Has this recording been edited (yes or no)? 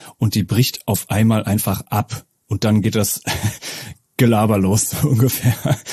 no